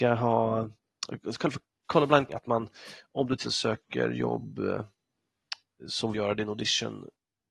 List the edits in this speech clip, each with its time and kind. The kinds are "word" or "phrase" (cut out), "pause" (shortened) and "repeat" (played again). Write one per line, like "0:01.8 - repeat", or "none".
0:02.3 - word
0:03.4 - word
0:06.1 - phrase